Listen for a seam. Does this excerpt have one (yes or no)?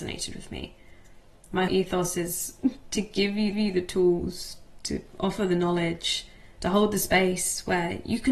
yes